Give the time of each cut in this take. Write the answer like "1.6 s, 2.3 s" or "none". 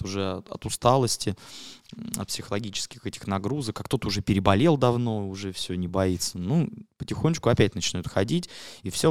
none